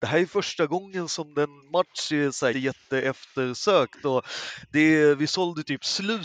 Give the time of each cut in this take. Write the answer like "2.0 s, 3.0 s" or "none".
2.5 s